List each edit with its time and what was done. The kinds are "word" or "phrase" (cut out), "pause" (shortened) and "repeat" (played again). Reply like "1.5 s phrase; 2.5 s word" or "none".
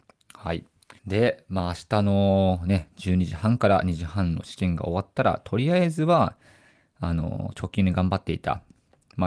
1.0 s pause